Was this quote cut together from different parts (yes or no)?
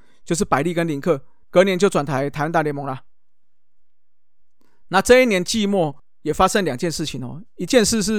yes